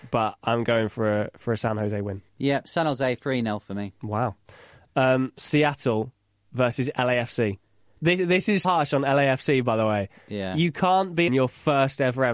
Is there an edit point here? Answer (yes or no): yes